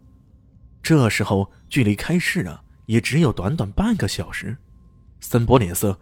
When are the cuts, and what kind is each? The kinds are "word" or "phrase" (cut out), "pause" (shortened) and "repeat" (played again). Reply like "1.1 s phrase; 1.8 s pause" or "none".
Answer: none